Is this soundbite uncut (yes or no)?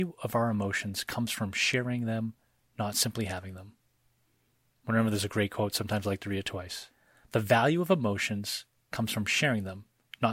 yes